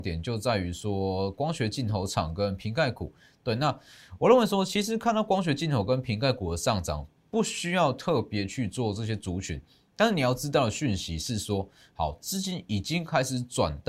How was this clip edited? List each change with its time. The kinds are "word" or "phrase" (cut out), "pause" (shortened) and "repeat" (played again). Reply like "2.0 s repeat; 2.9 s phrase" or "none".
none